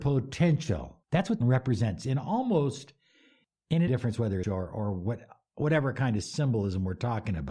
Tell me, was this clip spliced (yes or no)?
yes